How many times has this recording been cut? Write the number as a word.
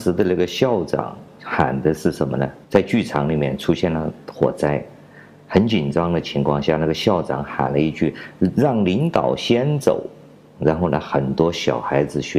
one